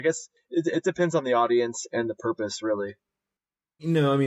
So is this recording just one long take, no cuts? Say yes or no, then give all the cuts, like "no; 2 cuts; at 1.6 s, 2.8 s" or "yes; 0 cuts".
yes; 0 cuts